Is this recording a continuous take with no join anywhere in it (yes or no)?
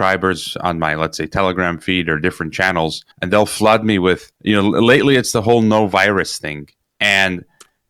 no